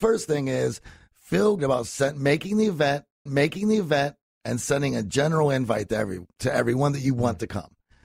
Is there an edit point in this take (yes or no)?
yes